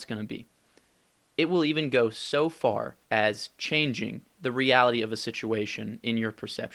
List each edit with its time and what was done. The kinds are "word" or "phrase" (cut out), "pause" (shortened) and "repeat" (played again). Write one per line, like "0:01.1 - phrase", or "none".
0:03.0 - pause
0:04.3 - pause